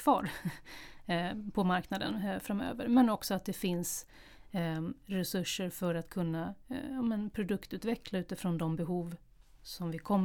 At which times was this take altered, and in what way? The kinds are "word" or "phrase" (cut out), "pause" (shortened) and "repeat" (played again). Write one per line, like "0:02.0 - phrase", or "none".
none